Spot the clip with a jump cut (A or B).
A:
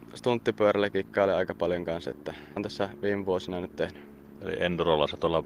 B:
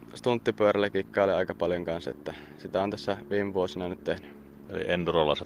A